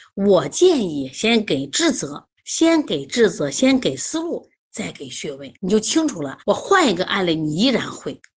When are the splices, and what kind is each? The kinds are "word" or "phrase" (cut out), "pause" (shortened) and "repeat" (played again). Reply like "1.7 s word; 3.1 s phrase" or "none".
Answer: 2.4 s pause; 5.6 s pause; 6.4 s pause

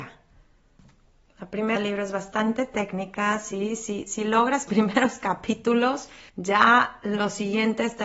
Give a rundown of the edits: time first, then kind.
1.8 s word; 4.7 s phrase; 6.3 s pause

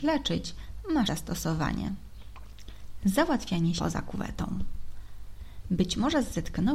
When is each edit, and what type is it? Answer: 1.1 s word; 3.8 s word

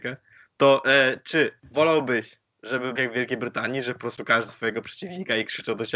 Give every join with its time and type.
1.6 s pause; 3.0 s phrase; 4.5 s word

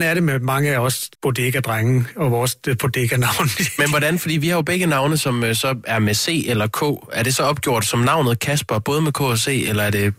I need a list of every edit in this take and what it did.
1.1 s pause

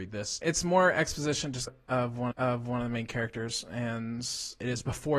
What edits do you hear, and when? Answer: 1.7 s word; 2.3 s repeat

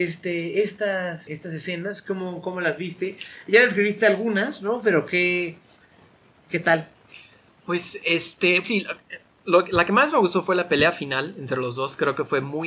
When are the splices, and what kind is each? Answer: 1.3 s word; 8.6 s word

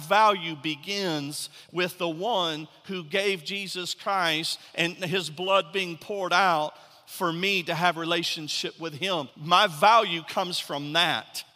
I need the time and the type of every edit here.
9.3 s pause

